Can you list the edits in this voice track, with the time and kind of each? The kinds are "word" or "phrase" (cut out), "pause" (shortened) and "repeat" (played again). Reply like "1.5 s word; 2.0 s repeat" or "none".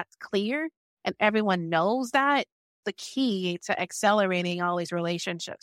2.8 s word

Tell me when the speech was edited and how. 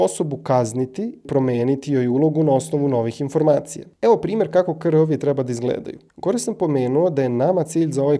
1.2 s word; 6.1 s pause

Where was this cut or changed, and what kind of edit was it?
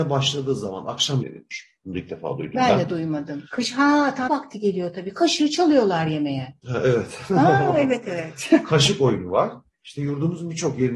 1.2 s phrase; 3.5 s pause; 4.3 s word

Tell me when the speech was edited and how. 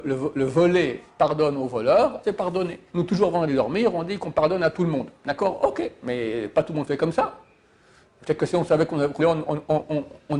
2.2 s word; 2.9 s pause; 3.5 s word; 9.2 s phrase

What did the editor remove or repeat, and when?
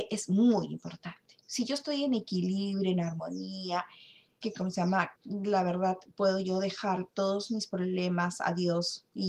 4.4 s word; 5.2 s word

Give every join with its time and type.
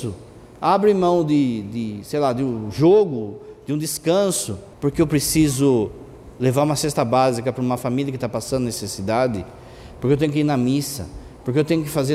4.7 s pause

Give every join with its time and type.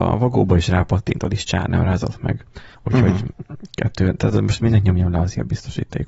2.7 s pause

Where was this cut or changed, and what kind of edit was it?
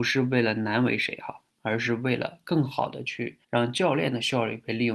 3.4 s pause

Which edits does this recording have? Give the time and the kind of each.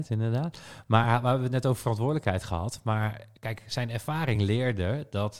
none

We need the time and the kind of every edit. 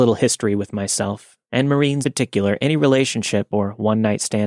2.0 s word

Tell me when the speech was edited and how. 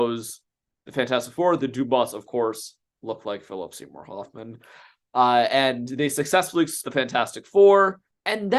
6.8 s word

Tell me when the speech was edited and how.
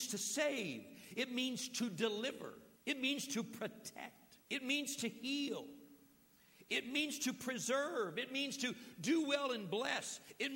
2.8 s pause; 4.4 s pause

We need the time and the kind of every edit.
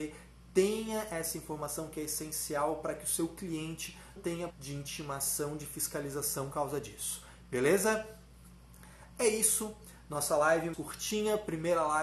4.2 s word; 4.5 s word; 6.5 s word; 10.7 s word

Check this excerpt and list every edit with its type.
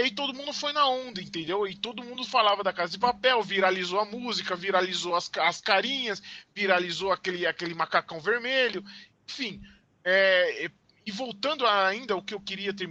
none

